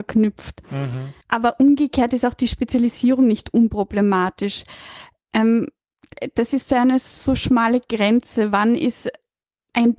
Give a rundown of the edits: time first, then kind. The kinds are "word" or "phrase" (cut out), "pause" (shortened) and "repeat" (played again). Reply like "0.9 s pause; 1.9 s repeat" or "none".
1.2 s pause